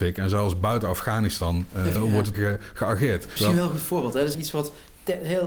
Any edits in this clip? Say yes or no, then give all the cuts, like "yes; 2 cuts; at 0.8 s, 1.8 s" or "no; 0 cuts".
yes; 4 cuts; at 2.0 s, 2.3 s, 3.4 s, 4.3 s